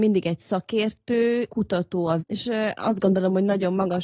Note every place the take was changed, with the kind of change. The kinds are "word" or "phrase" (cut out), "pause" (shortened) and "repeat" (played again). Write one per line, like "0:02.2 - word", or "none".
0:01.5 - word
0:02.2 - word